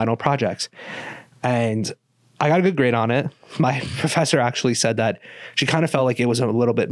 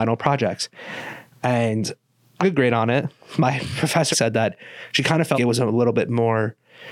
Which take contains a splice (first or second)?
second